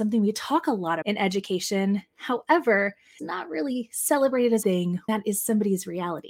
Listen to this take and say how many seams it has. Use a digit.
4